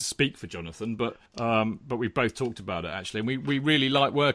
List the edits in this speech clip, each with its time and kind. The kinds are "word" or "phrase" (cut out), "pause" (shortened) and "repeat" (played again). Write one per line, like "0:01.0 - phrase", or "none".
0:01.3 - pause